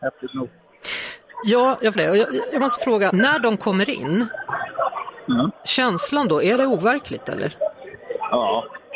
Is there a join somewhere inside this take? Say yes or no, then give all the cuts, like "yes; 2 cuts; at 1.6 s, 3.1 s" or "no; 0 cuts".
yes; 3 cuts; at 1.9 s, 2.8 s, 3.1 s